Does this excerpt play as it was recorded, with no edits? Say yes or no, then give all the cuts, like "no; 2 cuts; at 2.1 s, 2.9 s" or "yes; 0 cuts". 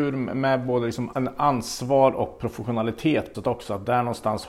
no; 2 cuts; at 1.1 s, 3.3 s